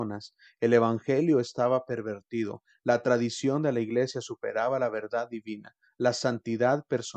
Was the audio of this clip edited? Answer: no; 0 cuts

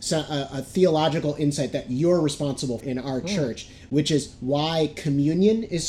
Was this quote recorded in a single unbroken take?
no; 1 cut; at 2.8 s

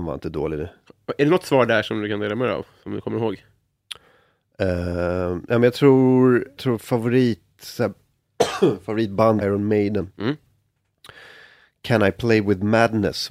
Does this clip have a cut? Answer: yes; 2 cuts; at 6.6 s, 9.4 s

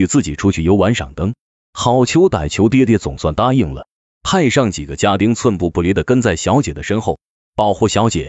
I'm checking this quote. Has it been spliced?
no; 0 cuts

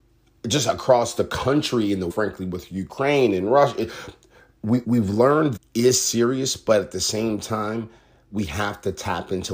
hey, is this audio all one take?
no; 3 cuts; at 2.1 s, 4.8 s, 5.6 s

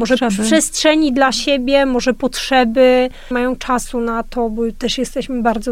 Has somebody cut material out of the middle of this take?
yes; 1 cut; at 3.3 s

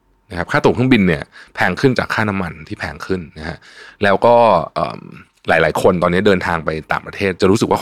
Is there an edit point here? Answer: no; 0 cuts

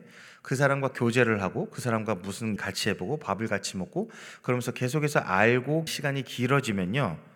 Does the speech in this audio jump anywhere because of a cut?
yes; 2 cuts; at 2.6 s, 5.9 s

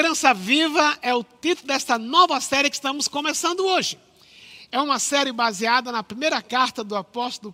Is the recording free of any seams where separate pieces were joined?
yes; 0 cuts

